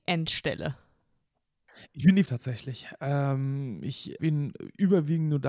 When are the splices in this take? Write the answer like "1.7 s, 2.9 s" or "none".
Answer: 2.3 s, 4.2 s